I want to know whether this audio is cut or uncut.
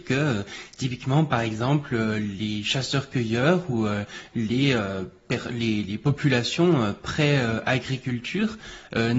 uncut